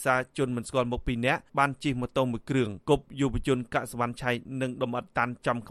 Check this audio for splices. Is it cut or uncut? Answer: cut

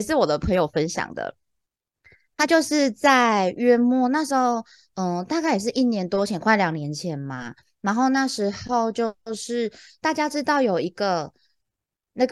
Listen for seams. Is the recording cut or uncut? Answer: uncut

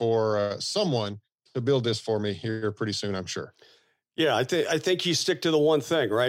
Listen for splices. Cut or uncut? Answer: uncut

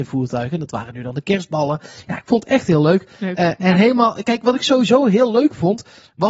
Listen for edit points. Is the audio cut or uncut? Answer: uncut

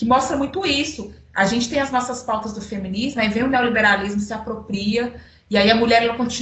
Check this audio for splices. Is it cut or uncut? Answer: uncut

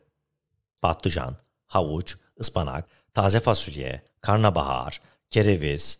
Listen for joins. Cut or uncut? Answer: uncut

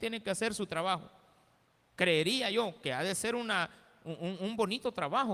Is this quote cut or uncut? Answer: uncut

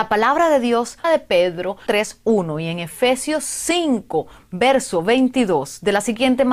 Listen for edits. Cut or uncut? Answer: cut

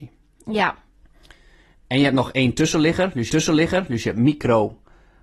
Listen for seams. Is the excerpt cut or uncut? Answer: cut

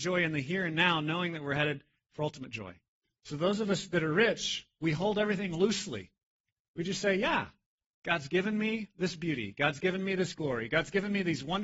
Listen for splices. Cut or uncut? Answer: uncut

